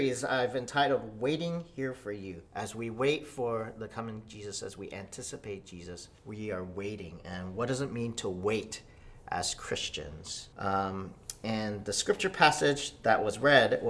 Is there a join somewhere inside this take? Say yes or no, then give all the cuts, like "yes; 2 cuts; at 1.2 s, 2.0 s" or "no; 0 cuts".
yes; 3 cuts; at 2.5 s, 6.2 s, 10.5 s